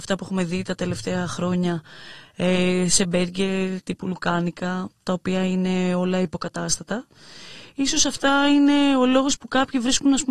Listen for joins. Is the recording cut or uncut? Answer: uncut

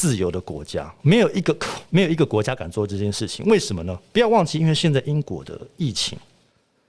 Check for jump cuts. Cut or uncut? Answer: cut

